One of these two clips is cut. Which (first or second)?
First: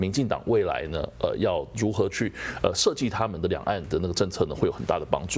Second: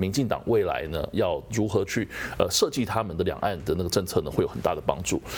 second